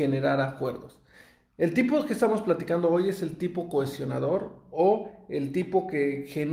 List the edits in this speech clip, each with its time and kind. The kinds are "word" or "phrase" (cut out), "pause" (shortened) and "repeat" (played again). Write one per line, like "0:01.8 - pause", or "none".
none